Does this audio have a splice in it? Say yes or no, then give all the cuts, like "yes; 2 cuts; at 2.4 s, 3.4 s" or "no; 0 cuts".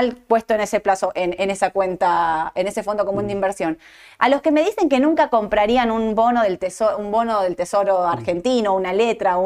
no; 0 cuts